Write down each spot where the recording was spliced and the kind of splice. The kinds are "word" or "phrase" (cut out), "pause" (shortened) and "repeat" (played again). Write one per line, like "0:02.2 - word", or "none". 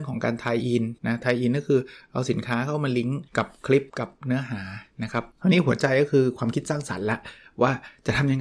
0:01.0 - pause
0:03.3 - pause
0:03.9 - pause
0:04.9 - pause
0:05.3 - pause